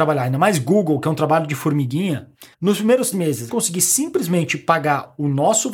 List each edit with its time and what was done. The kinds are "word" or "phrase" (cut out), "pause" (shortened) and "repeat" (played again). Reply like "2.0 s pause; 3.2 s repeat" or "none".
2.5 s pause; 3.1 s word; 3.5 s phrase